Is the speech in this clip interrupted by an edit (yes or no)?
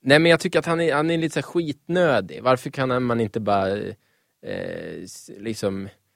no